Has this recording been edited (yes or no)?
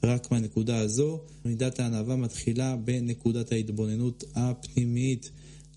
yes